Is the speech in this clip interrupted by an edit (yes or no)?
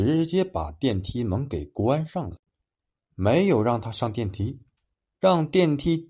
no